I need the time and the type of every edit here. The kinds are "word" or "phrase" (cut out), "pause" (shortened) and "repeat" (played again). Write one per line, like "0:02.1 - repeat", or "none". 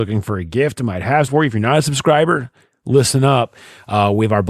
0:01.3 - word